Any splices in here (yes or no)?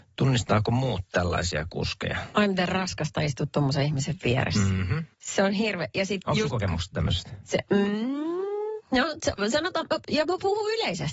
yes